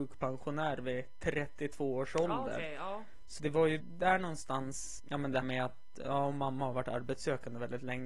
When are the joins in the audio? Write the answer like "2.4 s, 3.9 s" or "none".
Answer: 3.4 s, 3.8 s, 5.0 s, 5.4 s